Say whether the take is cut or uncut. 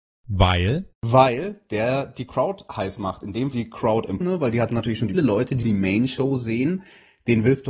cut